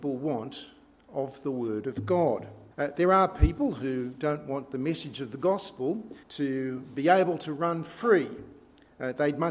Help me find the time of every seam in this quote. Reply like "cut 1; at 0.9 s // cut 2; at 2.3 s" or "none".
cut 1; at 2.7 s // cut 2; at 6.2 s